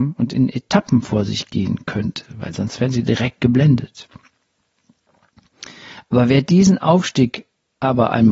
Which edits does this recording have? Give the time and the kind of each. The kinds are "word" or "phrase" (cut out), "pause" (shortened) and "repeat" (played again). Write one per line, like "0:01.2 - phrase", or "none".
none